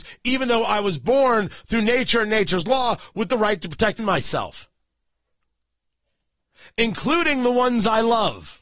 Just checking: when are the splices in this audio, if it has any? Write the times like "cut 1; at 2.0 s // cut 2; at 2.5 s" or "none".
cut 1; at 4.0 s